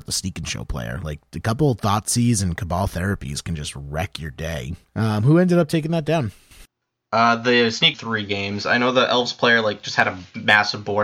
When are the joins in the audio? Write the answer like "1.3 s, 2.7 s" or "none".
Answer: 4.8 s, 6.8 s, 7.9 s